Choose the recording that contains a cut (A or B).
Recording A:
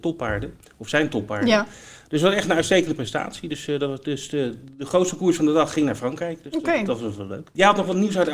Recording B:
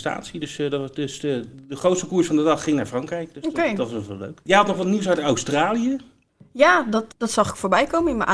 B